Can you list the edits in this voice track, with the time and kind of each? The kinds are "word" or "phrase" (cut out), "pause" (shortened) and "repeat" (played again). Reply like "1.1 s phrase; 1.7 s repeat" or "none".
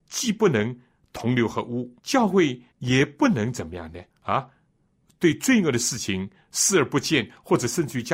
2.0 s pause; 2.7 s pause; 4.1 s pause